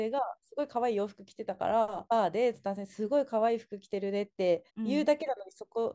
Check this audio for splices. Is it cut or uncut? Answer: cut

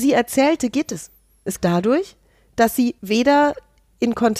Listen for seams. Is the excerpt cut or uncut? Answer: cut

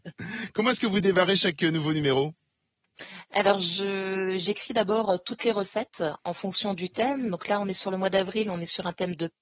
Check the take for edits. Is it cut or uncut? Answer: uncut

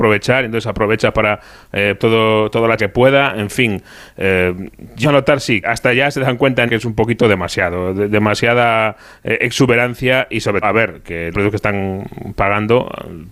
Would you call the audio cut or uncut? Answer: cut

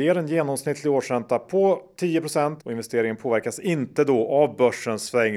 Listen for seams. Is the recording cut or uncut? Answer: cut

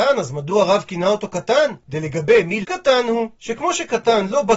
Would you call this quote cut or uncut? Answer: cut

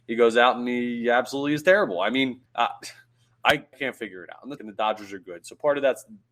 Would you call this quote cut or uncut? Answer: cut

